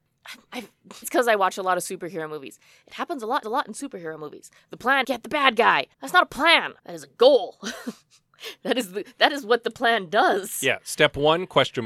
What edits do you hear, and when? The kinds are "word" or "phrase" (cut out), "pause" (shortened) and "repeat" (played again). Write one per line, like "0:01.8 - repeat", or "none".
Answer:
0:01.0 - word
0:03.4 - repeat
0:05.0 - word
0:05.9 - pause
0:06.8 - pause